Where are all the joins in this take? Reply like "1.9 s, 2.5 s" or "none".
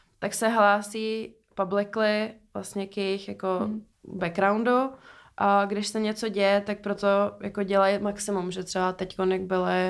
3.9 s